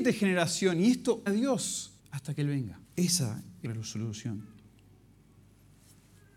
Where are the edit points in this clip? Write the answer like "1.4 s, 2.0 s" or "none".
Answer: 1.3 s, 2.0 s, 2.8 s, 3.6 s